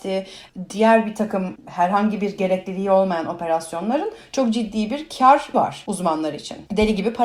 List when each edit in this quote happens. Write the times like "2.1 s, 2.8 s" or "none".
5.5 s

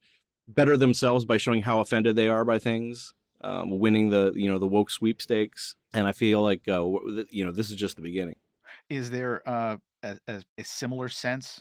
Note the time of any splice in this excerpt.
5.8 s, 10.5 s

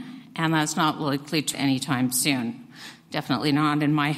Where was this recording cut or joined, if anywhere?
1.5 s

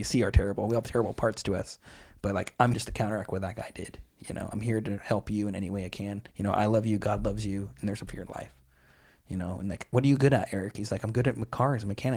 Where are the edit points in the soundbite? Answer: 2.7 s, 6.3 s, 8.1 s

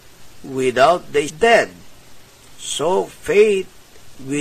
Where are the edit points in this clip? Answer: 1.3 s

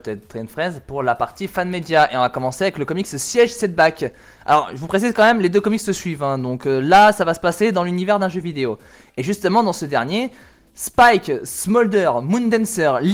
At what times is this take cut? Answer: none

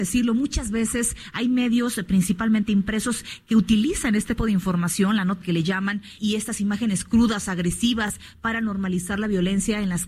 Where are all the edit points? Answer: 4.4 s, 5.4 s, 6.2 s

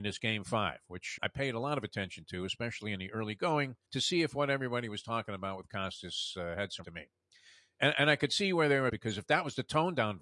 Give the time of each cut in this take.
1.2 s, 3.8 s, 6.8 s, 8.9 s

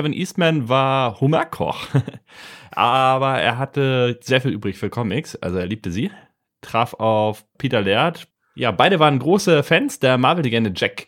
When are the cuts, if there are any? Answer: none

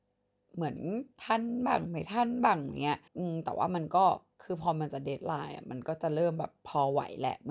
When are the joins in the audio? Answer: 1.1 s, 3.1 s

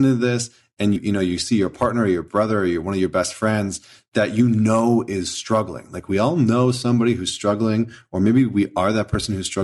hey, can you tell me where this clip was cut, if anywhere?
1.0 s

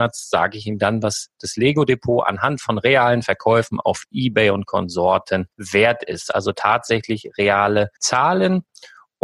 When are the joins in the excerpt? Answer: 5.5 s, 8.0 s

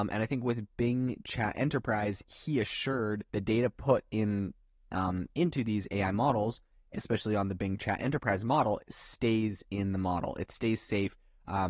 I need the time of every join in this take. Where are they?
3.3 s

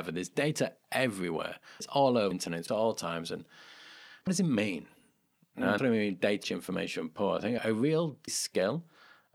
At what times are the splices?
1.8 s, 2.3 s, 2.7 s, 4.3 s, 5.8 s, 6.4 s, 7.6 s, 8.3 s

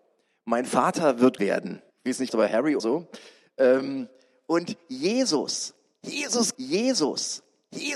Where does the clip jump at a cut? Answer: 1.4 s, 1.9 s, 2.3 s, 2.8 s, 6.5 s

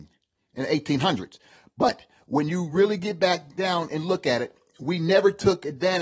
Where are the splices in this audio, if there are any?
none

